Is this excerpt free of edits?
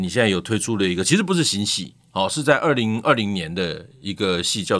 yes; 0 cuts

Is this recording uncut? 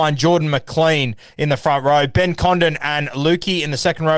yes; 0 cuts

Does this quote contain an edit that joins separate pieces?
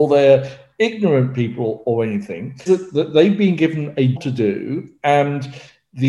yes; 2 cuts; at 2.7 s, 4.2 s

